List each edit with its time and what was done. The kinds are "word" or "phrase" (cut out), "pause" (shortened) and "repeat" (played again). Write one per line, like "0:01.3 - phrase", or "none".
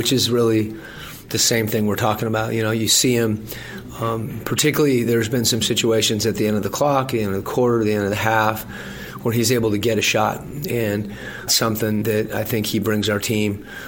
0:01.3 - word
0:11.5 - word
0:12.0 - word